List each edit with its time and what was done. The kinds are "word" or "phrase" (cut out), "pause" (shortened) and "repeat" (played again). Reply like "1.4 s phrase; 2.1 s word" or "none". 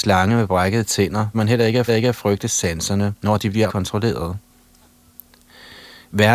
1.3 s word; 1.9 s repeat; 3.2 s pause; 3.7 s word